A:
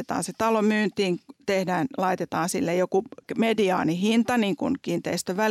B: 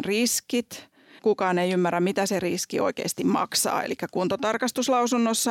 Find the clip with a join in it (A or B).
B